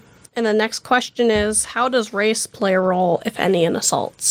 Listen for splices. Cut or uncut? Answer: uncut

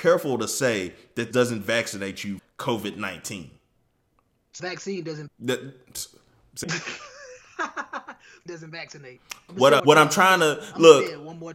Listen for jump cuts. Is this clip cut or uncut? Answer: cut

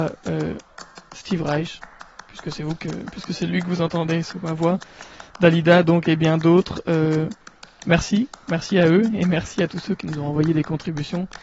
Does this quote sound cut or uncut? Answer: uncut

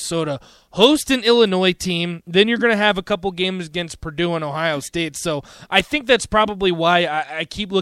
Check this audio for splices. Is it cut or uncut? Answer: uncut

